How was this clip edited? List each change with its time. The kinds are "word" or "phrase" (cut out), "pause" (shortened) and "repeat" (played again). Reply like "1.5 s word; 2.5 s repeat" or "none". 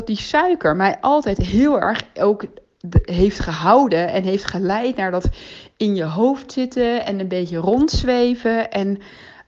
none